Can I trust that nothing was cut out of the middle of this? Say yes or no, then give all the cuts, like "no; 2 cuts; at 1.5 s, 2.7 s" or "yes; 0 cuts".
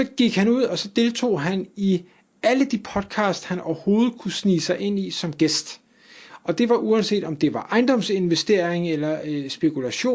yes; 0 cuts